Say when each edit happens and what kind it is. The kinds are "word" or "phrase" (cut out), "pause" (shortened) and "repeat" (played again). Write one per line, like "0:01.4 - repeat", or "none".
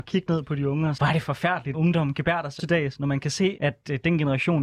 0:01.0 - word
0:01.7 - word
0:02.6 - word
0:03.6 - word